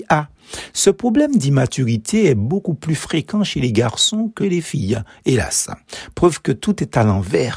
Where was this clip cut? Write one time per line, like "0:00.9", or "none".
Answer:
0:04.4